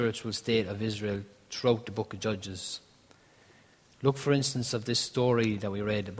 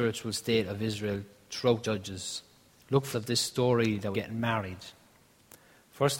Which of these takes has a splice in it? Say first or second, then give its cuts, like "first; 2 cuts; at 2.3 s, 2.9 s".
second; 4 cuts; at 1.8 s, 2.7 s, 3.1 s, 4.1 s